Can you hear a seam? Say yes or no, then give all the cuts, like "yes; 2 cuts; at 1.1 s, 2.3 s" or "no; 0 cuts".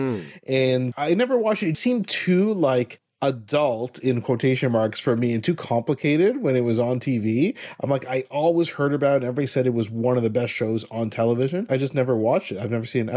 yes; 1 cut; at 1.7 s